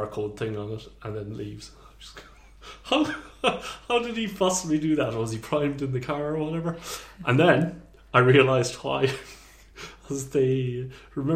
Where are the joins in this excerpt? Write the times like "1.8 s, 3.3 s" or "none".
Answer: none